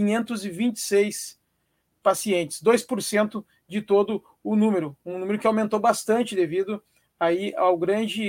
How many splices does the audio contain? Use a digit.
0